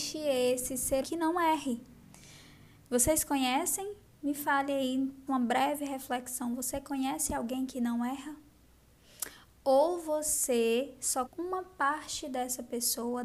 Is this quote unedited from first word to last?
no; 3 cuts; at 1.0 s, 5.3 s, 11.3 s

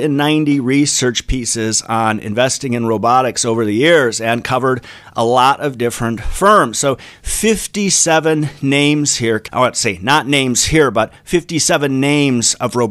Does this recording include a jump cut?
yes; 1 cut; at 9.5 s

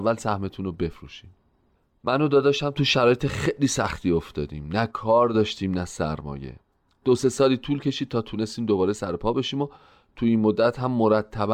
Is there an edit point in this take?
no; 0 cuts

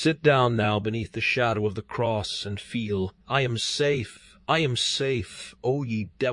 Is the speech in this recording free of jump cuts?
no; 1 cut; at 3.2 s

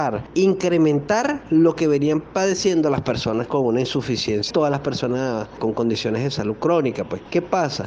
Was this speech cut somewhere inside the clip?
yes; 1 cut; at 4.5 s

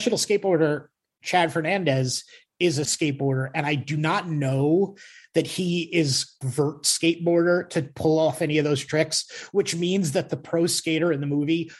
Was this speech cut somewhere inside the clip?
yes; 2 cuts; at 2.8 s, 6.4 s

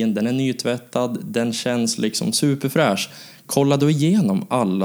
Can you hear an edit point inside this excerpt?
no; 0 cuts

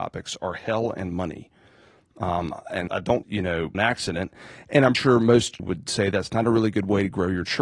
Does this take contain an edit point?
yes; 5 cuts; at 2.9 s, 3.2 s, 3.7 s, 4.9 s, 5.6 s

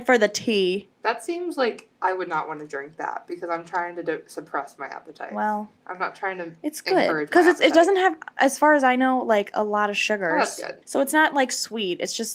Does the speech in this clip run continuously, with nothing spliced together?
no; 4 cuts; at 0.9 s, 1.9 s, 5.8 s, 10.8 s

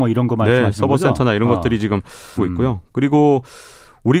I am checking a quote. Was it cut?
yes; 1 cut; at 2.4 s

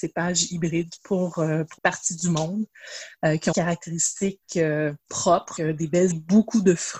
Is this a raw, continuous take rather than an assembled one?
no; 5 cuts; at 1.0 s, 1.8 s, 3.5 s, 5.6 s, 6.1 s

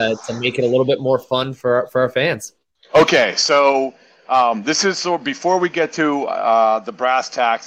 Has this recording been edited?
no; 0 cuts

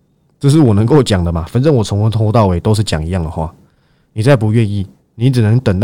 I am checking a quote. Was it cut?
no; 0 cuts

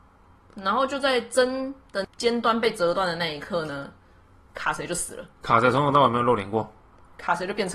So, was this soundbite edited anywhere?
yes; 1 cut; at 5.3 s

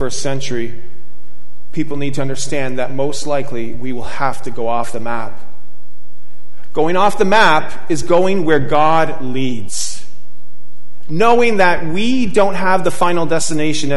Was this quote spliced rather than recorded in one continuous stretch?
no; 0 cuts

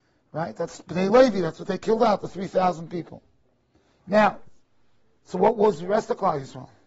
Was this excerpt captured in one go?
yes; 0 cuts

